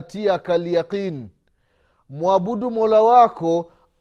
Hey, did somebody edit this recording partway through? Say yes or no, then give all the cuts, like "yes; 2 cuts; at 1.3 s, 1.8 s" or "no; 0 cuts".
no; 0 cuts